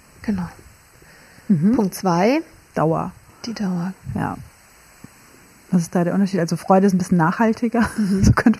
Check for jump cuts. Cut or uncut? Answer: uncut